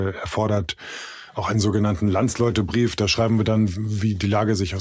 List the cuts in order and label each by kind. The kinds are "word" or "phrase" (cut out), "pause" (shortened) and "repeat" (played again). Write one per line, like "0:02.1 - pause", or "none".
none